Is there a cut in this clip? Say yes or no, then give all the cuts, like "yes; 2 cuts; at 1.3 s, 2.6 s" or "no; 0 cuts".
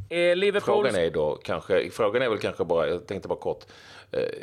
no; 0 cuts